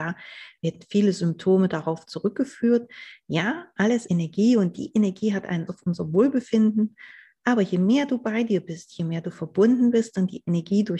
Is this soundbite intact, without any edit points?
no; 2 cuts; at 4.1 s, 5.7 s

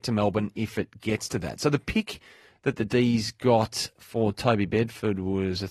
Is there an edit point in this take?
no; 0 cuts

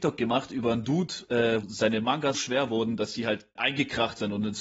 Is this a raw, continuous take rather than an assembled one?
no; 3 cuts; at 1.6 s, 2.3 s, 3.6 s

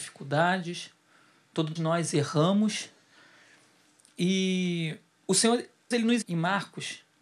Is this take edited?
yes; 3 cuts; at 1.8 s, 5.9 s, 6.2 s

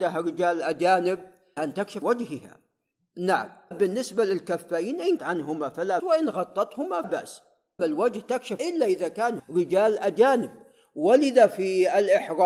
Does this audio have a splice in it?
yes; 9 cuts; at 1.6 s, 2.0 s, 3.7 s, 5.2 s, 6.0 s, 7.0 s, 7.8 s, 8.6 s, 9.4 s

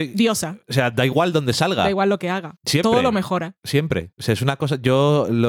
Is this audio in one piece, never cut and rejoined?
yes; 0 cuts

